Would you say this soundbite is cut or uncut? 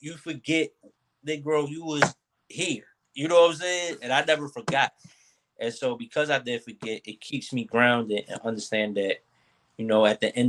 uncut